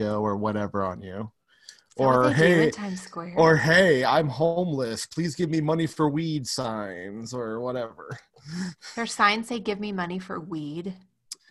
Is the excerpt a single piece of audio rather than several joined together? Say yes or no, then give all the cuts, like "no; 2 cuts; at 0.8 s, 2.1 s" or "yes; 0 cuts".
yes; 0 cuts